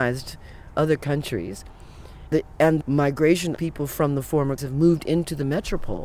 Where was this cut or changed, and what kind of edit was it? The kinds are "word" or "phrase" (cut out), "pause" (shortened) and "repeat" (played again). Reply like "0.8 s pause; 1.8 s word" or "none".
2.3 s word; 2.8 s word; 3.6 s word; 4.6 s word